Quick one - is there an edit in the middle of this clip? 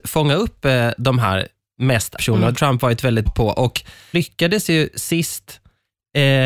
yes; 4 cuts; at 2.2 s, 2.5 s, 3.3 s, 4.1 s

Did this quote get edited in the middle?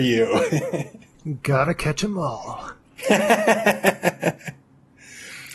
no; 0 cuts

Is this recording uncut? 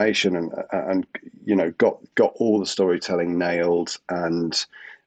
yes; 0 cuts

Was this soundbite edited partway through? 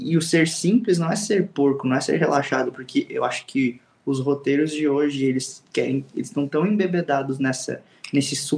no; 0 cuts

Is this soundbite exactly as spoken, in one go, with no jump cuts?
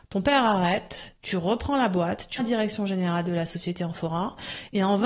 no; 1 cut; at 2.4 s

